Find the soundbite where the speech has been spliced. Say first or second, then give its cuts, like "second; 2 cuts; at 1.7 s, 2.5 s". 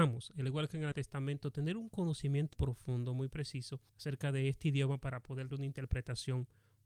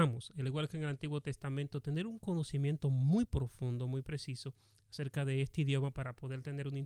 first; 4 cuts; at 0.9 s, 2.5 s, 3.9 s, 5.5 s